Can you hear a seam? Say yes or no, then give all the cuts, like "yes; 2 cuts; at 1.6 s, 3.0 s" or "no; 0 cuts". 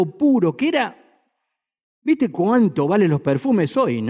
no; 0 cuts